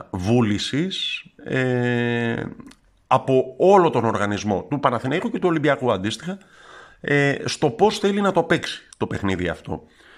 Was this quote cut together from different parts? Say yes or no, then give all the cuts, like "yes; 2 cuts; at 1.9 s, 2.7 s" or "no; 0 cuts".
no; 0 cuts